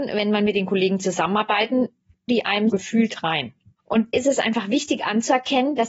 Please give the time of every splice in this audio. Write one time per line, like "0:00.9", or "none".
0:02.3
0:02.7
0:04.1